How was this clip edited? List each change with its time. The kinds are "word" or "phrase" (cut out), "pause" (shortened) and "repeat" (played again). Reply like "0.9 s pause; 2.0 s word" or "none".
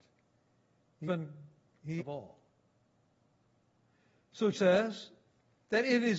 1.1 s word; 2.0 s phrase; 4.5 s word